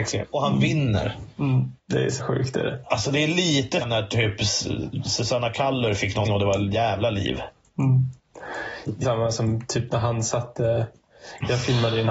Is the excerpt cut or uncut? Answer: cut